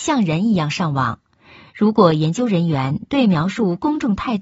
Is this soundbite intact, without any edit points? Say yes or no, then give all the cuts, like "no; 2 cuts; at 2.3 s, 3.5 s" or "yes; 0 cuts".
yes; 0 cuts